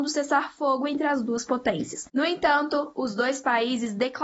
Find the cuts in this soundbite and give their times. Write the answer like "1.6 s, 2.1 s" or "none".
2.1 s